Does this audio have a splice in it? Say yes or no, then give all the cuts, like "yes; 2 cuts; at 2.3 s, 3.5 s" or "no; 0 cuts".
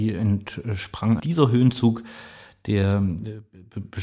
yes; 1 cut; at 1.2 s